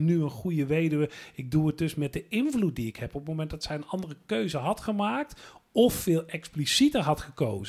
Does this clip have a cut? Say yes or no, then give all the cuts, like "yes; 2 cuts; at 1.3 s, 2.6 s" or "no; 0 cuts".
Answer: no; 0 cuts